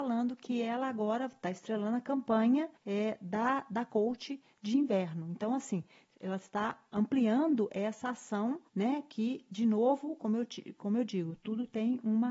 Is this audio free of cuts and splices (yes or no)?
no